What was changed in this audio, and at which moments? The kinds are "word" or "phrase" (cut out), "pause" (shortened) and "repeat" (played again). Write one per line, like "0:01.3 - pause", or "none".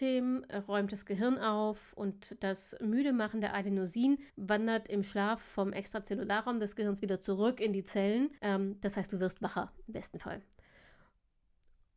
0:04.3 - pause
0:08.4 - pause